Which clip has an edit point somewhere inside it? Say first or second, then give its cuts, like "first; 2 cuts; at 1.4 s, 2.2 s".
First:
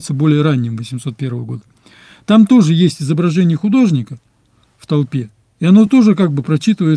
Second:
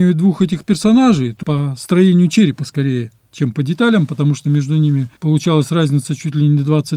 second; 2 cuts; at 1.4 s, 5.2 s